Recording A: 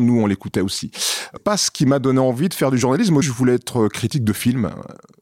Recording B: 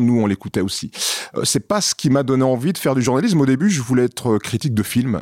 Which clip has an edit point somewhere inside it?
A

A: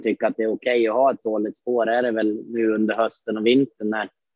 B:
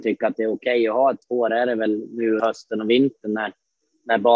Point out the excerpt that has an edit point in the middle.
B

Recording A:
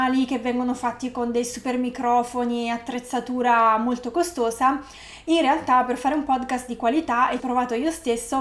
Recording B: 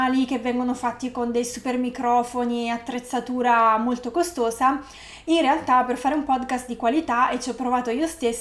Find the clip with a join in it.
A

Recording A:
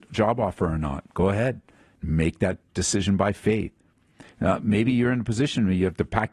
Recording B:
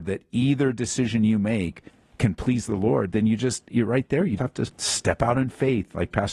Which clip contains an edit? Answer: B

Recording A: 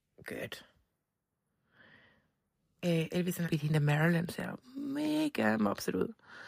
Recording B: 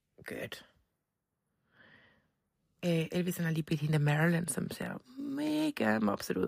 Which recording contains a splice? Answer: A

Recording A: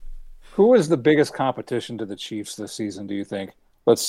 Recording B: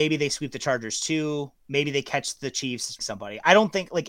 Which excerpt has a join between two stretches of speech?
B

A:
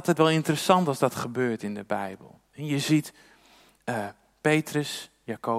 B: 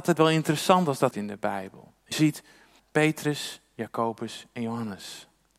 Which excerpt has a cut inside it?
B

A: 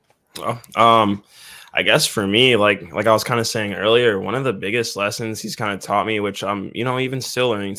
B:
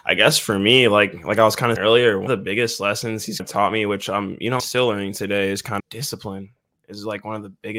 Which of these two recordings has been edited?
B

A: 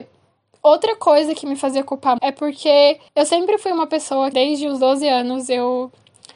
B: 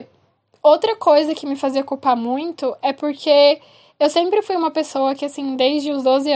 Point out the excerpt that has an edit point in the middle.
A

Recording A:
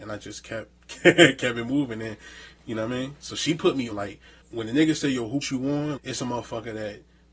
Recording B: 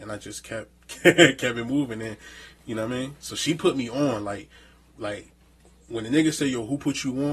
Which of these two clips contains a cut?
A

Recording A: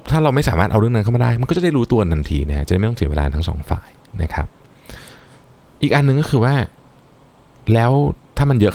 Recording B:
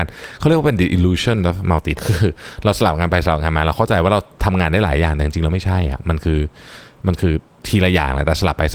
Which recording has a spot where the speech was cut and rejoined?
B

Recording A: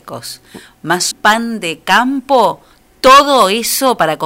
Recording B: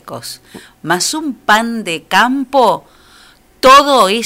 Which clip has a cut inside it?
A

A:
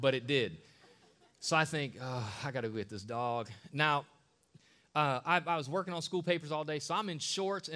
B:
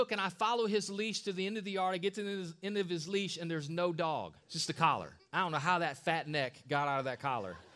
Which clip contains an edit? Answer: B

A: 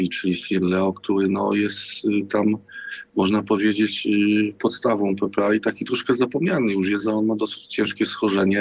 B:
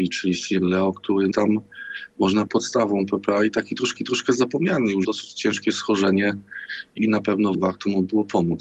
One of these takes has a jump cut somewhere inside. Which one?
B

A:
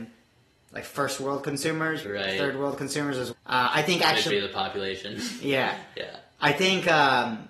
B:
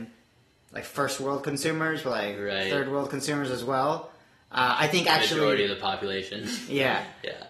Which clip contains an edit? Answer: A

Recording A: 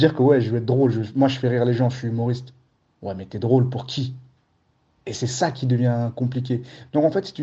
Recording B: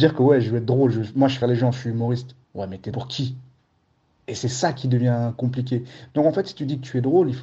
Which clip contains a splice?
B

